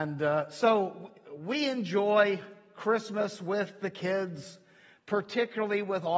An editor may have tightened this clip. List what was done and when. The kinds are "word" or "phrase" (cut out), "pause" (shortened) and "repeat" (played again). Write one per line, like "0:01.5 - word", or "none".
none